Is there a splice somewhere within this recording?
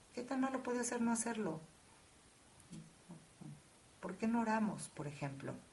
no; 0 cuts

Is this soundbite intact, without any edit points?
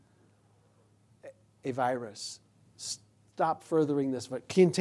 yes; 0 cuts

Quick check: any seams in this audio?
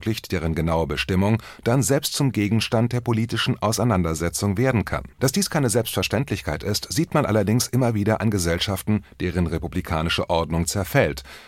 yes; 1 cut; at 5.1 s

